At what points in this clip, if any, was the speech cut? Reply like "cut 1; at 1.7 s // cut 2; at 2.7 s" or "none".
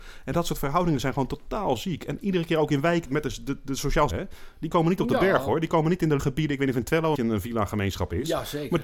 cut 1; at 3.1 s // cut 2; at 4.1 s // cut 3; at 6.2 s // cut 4; at 7.2 s